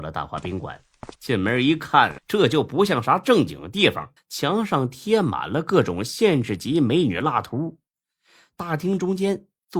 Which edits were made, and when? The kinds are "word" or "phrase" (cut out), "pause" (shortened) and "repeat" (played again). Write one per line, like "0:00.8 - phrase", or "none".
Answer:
0:01.1 - pause
0:02.2 - phrase
0:04.2 - pause